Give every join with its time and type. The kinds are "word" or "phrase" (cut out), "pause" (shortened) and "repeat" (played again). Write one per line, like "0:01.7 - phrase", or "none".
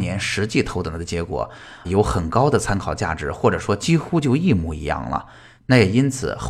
0:01.8 - word